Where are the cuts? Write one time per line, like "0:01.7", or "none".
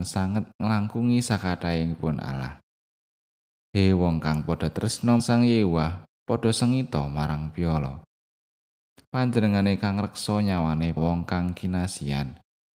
0:05.2
0:11.0